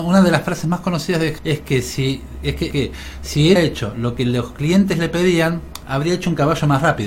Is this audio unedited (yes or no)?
no